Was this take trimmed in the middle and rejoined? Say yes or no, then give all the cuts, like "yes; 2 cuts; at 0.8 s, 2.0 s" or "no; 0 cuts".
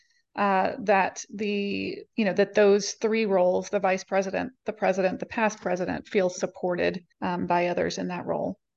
yes; 2 cuts; at 2.1 s, 7.1 s